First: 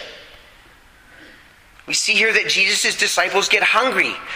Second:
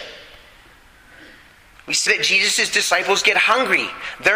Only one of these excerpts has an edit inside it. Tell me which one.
second; 1 cut; at 2.1 s

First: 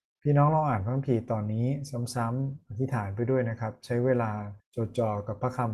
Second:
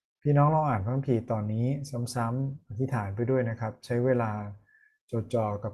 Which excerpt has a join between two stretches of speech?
first; 1 cut; at 4.6 s

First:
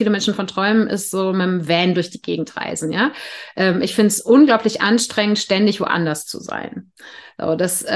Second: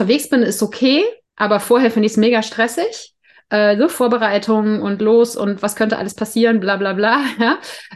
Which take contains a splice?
second; 1 cut; at 1.2 s

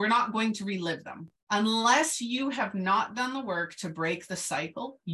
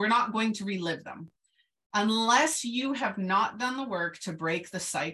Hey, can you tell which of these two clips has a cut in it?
first; 1 cut; at 1.4 s

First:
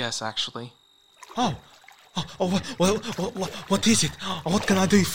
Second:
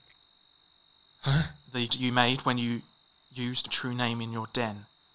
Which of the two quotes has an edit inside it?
second; 2 cuts; at 1.9 s, 3.7 s

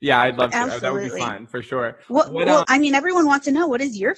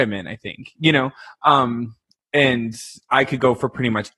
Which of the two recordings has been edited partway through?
first; 2 cuts; at 2.0 s, 2.6 s

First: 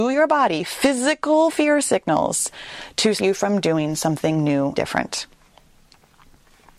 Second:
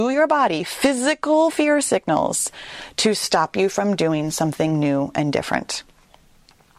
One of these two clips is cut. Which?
first; 2 cuts; at 3.2 s, 4.8 s

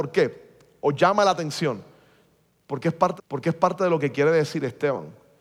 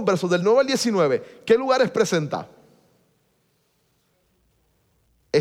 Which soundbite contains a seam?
first; 1 cut; at 3.2 s

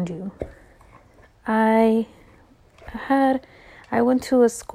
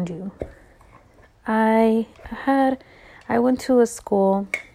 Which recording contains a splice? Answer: second; 1 cut; at 2.1 s

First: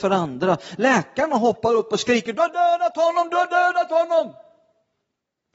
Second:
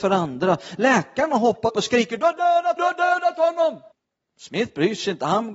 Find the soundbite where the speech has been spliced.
second; 3 cuts; at 1.7 s, 2.8 s, 3.9 s

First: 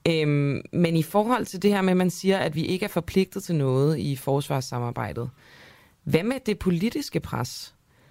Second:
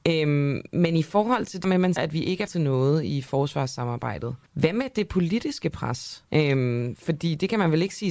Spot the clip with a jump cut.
second; 5 cuts; at 1.6 s, 2.0 s, 2.5 s, 4.5 s, 6.3 s

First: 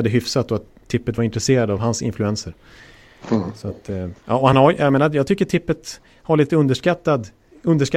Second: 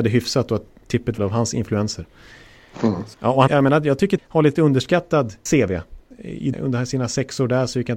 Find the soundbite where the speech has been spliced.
second; 7 cuts; at 1.2 s, 3.1 s, 3.5 s, 4.2 s, 5.5 s, 6.1 s, 6.5 s

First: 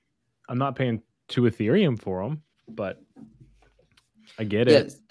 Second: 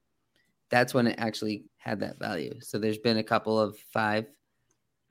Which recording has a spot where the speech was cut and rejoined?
second; 1 cut; at 1.7 s

